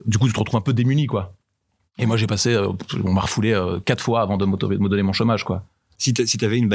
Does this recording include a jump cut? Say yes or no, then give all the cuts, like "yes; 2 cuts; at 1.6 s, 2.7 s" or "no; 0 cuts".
no; 0 cuts